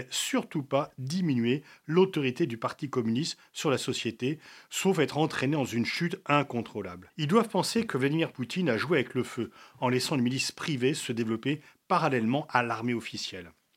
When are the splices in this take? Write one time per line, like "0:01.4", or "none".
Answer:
none